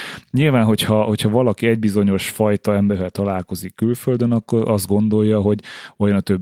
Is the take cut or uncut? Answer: uncut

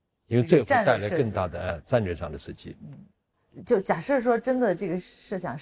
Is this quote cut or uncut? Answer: uncut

